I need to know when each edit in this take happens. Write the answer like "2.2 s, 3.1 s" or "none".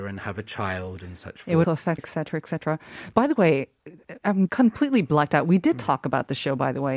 1.6 s, 2.0 s, 4.5 s

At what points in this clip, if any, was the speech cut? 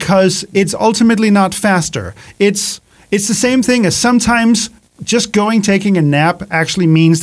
none

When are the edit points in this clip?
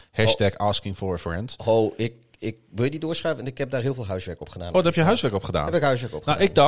none

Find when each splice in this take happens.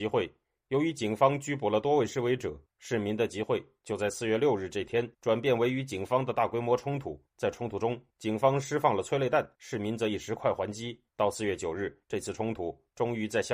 5.1 s, 7.3 s, 8.1 s, 9.5 s, 11.1 s, 12.0 s

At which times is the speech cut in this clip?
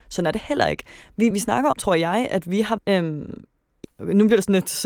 1.3 s, 1.7 s, 2.8 s, 3.8 s

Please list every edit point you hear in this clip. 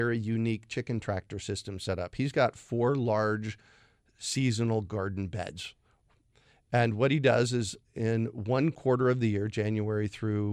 none

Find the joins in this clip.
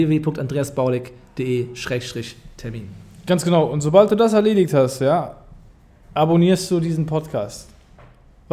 none

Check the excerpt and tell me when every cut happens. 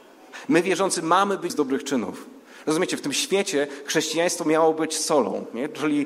1.5 s

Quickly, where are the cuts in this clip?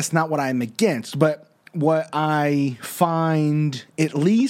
none

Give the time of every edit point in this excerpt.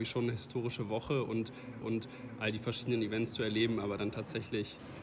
1.8 s

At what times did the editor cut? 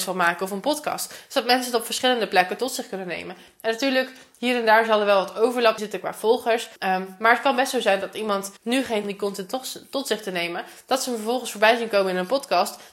5.8 s, 6.8 s, 8.6 s, 9.0 s

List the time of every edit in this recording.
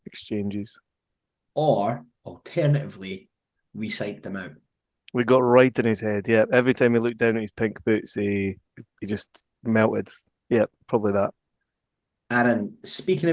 none

